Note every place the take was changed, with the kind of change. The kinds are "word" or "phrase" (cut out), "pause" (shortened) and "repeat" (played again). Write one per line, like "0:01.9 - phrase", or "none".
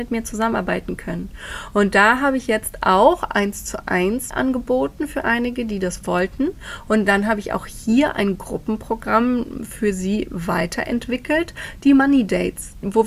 0:04.3 - word